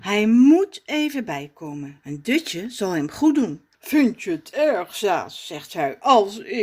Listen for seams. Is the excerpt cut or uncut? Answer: cut